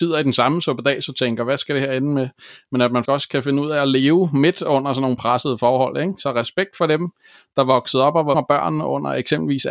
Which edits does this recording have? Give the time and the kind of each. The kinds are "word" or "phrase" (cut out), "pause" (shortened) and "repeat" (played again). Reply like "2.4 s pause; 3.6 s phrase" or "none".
3.1 s word; 8.3 s word